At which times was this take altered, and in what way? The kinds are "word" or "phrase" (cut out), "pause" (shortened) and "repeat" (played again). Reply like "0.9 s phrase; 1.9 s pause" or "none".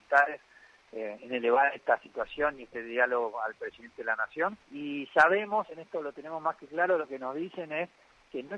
4.6 s pause